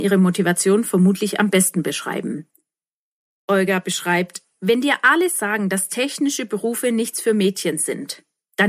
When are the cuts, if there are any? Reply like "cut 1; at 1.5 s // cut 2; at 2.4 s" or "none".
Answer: cut 1; at 3.0 s